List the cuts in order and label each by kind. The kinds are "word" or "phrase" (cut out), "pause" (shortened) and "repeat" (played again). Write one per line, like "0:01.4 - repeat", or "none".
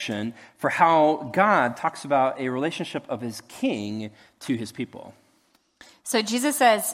none